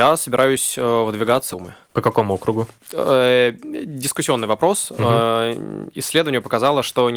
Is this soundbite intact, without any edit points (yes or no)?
no